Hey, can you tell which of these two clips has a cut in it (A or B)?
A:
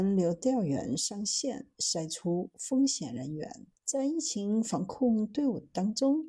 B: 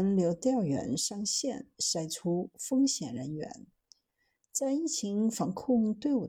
A